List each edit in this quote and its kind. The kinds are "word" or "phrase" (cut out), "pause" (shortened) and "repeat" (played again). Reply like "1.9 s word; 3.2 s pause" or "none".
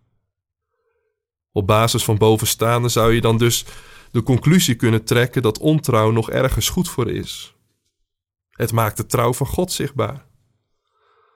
none